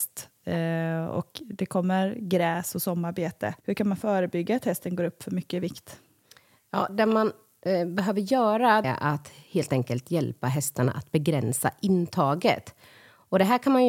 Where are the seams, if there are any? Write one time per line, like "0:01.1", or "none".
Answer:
0:03.6
0:08.8